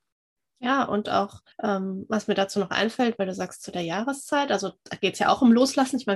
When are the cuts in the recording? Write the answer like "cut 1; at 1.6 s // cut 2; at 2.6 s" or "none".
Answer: cut 1; at 1.5 s